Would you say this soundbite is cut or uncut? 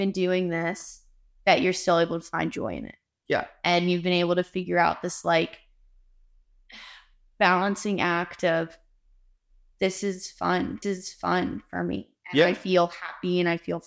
cut